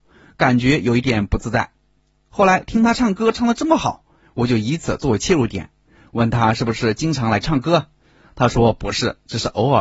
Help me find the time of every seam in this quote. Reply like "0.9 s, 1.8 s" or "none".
7.4 s